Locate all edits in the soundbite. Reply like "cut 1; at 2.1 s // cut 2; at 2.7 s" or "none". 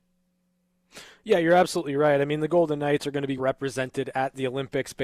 cut 1; at 3.4 s